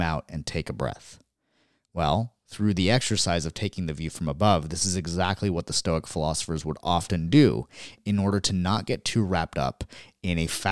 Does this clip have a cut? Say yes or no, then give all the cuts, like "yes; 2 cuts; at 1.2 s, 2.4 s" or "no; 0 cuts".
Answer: no; 0 cuts